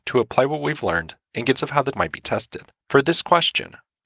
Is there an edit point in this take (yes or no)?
yes